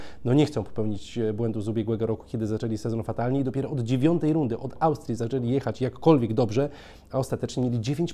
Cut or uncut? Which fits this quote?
uncut